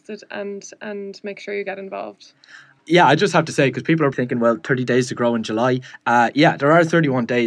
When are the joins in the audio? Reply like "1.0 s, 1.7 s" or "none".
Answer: 4.1 s